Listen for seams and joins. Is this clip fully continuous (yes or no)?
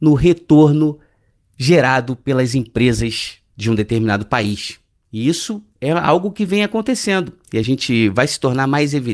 yes